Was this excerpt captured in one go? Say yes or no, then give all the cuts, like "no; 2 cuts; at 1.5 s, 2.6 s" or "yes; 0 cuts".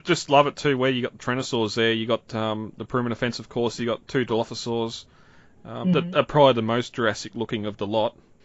yes; 0 cuts